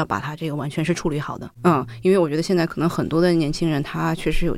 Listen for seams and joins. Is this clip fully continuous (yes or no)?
no